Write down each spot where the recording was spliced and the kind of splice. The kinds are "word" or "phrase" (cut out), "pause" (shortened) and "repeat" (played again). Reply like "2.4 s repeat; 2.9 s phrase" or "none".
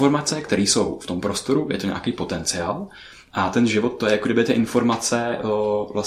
none